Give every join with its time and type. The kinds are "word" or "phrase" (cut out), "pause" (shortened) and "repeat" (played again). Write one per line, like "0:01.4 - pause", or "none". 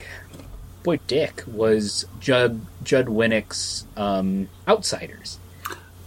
0:01.0 - phrase
0:02.1 - word